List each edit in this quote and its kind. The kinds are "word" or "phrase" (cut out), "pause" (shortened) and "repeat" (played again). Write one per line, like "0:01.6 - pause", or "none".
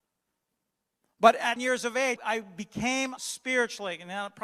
0:01.6 - word
0:02.2 - word
0:03.2 - word